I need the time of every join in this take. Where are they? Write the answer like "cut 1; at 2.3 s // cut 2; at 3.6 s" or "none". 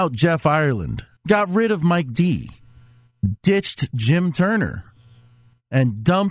cut 1; at 1.2 s